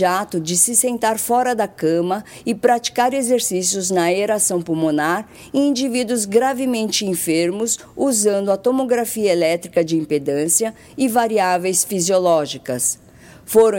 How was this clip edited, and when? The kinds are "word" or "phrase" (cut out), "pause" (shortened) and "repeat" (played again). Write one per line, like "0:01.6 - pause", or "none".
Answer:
none